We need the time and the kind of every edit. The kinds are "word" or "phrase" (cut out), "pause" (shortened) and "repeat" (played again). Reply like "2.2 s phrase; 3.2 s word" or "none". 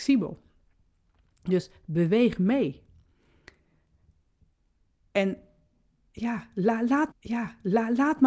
7.1 s repeat